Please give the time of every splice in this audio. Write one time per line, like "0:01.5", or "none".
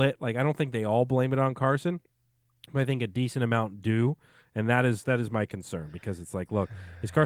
none